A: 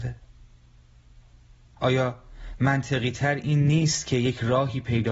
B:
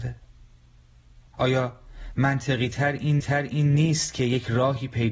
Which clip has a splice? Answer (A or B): B